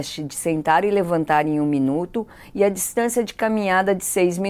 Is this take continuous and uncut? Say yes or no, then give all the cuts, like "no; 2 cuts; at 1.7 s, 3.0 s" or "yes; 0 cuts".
yes; 0 cuts